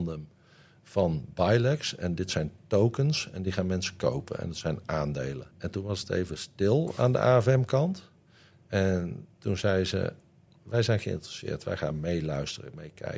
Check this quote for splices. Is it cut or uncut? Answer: cut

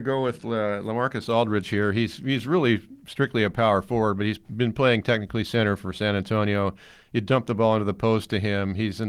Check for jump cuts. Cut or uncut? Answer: uncut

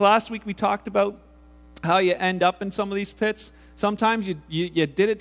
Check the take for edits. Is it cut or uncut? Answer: uncut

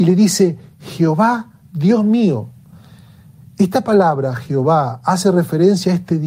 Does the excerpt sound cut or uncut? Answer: uncut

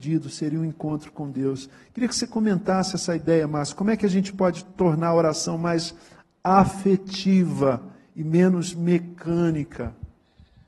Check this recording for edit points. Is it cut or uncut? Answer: uncut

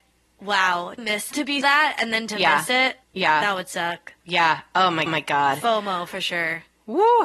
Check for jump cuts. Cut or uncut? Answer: cut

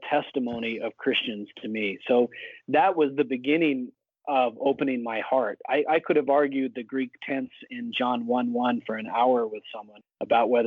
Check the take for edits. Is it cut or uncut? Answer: uncut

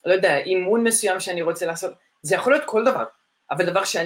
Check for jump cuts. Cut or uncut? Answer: uncut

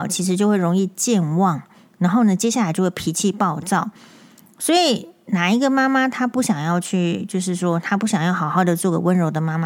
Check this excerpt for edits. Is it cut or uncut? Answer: uncut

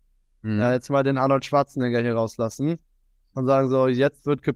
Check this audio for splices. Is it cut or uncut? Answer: uncut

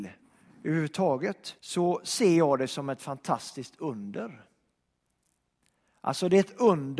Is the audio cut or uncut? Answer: cut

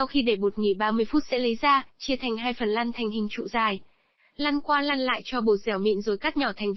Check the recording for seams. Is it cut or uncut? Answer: uncut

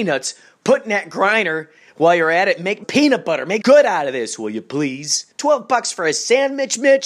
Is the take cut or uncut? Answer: cut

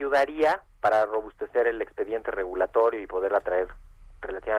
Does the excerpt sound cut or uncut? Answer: uncut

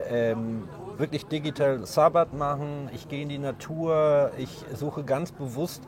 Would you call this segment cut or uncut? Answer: cut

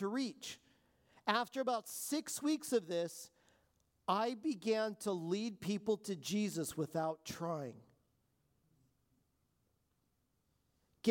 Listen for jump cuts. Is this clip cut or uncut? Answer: uncut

